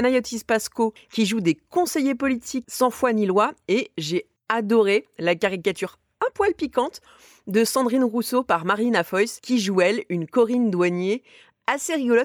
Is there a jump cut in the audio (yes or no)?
no